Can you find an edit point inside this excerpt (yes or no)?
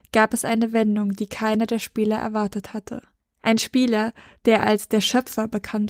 no